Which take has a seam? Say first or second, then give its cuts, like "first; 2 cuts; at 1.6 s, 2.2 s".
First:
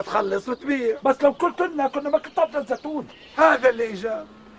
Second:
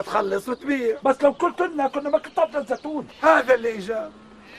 second; 1 cut; at 3.1 s